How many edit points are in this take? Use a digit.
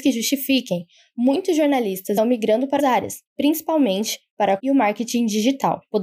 4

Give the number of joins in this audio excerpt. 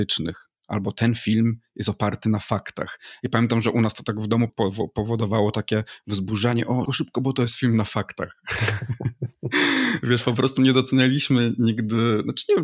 2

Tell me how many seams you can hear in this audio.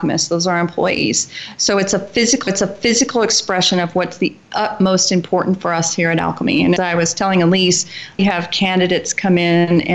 3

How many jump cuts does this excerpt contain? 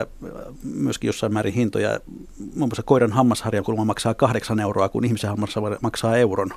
0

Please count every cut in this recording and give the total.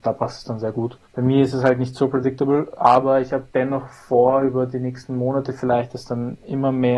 2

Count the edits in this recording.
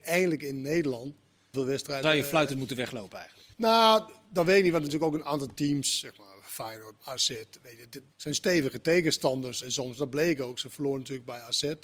7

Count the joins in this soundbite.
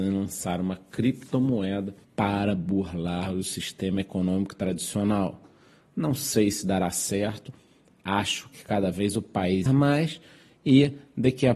2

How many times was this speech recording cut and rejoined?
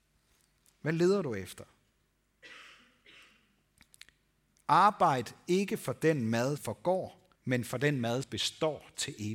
3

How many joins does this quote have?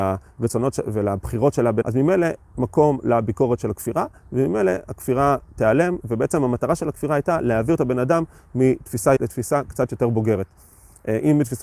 3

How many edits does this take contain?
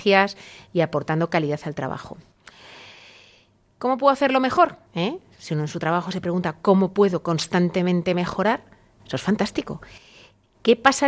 1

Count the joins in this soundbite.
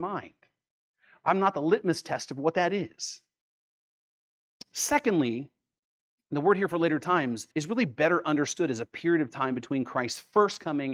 1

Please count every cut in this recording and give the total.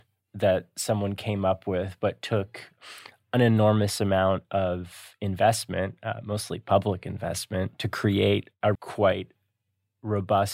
1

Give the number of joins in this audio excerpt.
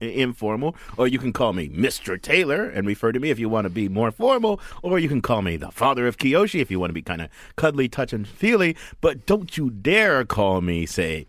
0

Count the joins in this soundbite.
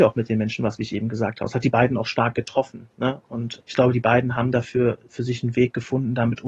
1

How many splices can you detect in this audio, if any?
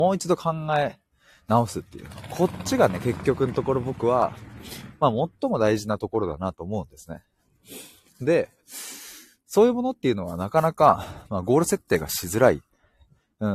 0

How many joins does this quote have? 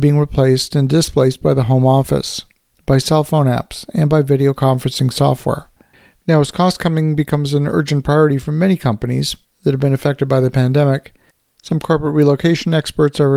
0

